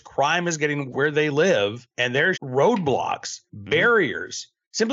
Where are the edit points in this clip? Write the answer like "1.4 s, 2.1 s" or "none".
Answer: 0.9 s, 1.9 s, 2.3 s, 3.5 s